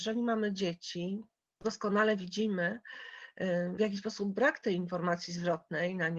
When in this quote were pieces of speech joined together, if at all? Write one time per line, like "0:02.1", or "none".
0:01.6
0:03.8